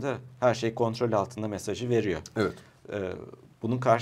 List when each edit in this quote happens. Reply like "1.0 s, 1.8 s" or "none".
none